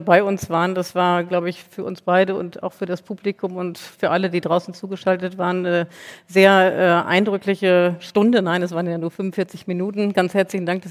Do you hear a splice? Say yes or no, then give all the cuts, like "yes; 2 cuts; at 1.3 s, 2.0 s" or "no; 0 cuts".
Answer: no; 0 cuts